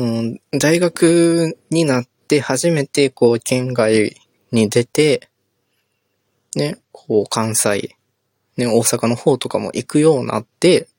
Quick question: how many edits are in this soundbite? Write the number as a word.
three